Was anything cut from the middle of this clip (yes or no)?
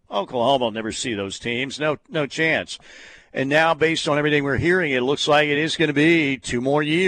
no